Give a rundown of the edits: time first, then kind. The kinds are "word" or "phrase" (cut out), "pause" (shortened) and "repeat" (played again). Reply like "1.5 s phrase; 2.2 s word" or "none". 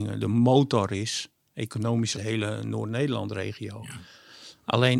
2.1 s phrase